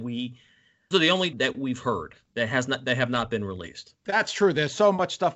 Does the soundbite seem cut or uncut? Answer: cut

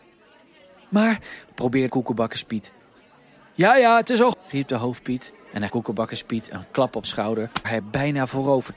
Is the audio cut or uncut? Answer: cut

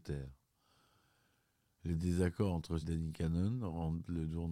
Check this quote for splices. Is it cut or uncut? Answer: cut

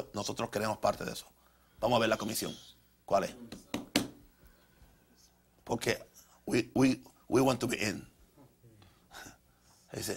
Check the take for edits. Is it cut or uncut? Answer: uncut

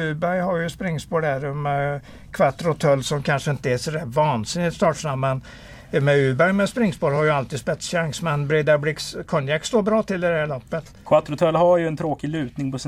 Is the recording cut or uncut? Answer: uncut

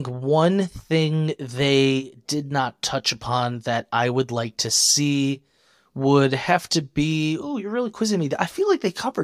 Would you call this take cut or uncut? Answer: uncut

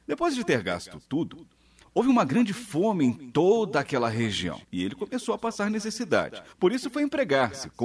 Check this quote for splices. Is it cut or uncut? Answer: cut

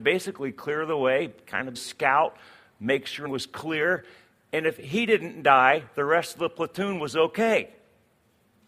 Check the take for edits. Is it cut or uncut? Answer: cut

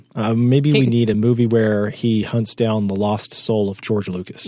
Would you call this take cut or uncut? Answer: uncut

